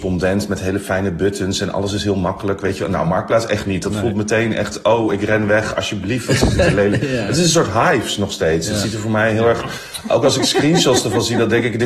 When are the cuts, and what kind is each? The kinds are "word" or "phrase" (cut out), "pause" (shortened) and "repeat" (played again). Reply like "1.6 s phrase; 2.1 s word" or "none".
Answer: none